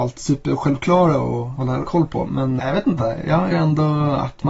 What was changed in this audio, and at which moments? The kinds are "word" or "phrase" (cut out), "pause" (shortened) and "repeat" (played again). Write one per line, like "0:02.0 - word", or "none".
0:02.6 - word
0:03.5 - phrase